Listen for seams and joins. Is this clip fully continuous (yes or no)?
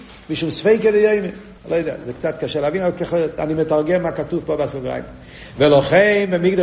no